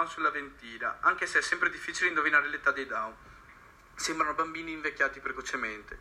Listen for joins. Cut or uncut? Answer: uncut